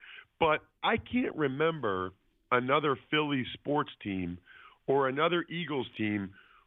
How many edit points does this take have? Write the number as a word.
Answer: zero